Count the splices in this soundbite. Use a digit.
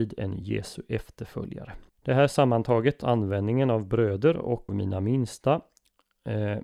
2